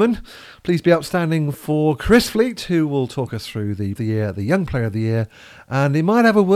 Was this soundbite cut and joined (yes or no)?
yes